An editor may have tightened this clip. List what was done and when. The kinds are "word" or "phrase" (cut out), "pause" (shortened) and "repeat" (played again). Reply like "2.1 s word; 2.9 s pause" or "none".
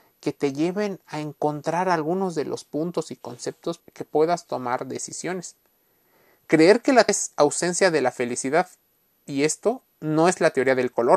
3.8 s word; 7.1 s word